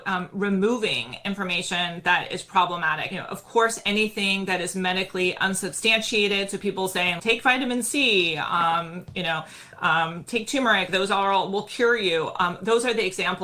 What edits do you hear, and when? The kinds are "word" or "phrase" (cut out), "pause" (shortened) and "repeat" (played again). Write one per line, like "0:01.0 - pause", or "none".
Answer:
0:07.2 - word
0:10.9 - word